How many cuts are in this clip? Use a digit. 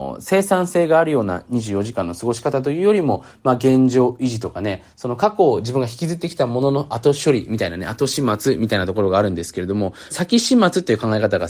1